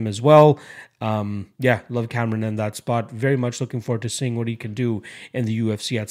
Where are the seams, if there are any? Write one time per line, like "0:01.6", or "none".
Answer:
0:01.5